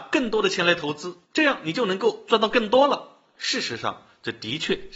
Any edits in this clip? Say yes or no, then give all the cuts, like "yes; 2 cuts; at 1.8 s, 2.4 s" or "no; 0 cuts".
yes; 1 cut; at 1.2 s